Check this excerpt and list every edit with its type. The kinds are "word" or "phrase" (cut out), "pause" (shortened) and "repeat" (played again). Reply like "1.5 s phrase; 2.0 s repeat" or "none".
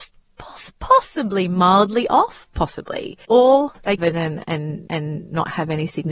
3.2 s pause; 4.0 s phrase; 4.9 s repeat